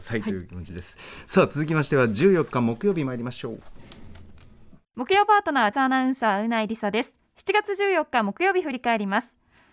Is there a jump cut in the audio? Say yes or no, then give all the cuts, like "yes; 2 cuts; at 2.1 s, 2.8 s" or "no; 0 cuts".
yes; 2 cuts; at 4.8 s, 5.7 s